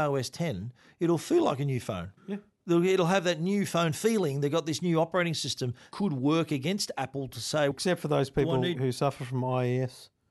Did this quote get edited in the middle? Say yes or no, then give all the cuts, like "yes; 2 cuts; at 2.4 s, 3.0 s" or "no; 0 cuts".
yes; 4 cuts; at 2.2 s, 5.9 s, 7.7 s, 8.7 s